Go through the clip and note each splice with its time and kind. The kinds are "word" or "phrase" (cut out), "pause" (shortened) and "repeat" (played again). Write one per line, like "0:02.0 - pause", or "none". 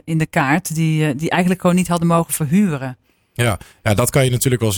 none